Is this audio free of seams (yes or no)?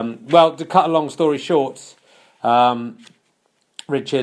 yes